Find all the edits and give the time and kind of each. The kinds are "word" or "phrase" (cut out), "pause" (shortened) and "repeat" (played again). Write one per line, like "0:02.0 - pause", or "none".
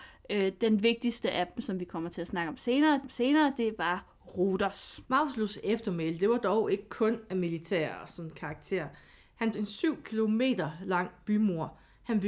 0:03.0 - repeat
0:05.0 - pause
0:09.5 - phrase